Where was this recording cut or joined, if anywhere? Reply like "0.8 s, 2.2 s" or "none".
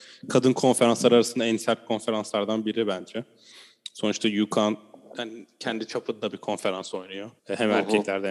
7.4 s